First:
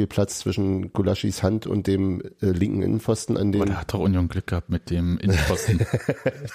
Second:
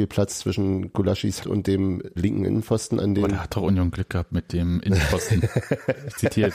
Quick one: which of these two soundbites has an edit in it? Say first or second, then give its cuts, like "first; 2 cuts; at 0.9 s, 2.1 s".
second; 2 cuts; at 1.4 s, 2.2 s